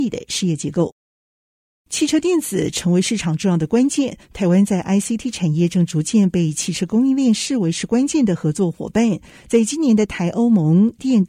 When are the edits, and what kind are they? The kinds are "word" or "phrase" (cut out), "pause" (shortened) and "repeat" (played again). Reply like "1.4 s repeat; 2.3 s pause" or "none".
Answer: none